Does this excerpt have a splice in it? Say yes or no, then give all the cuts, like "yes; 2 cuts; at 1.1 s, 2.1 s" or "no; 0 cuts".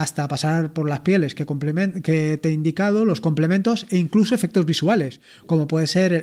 no; 0 cuts